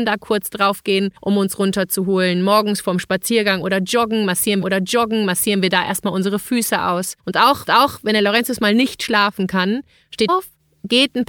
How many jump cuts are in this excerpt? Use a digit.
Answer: 5